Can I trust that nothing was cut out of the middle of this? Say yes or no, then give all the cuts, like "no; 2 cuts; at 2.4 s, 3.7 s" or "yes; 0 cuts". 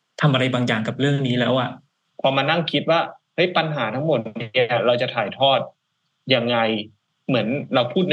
yes; 0 cuts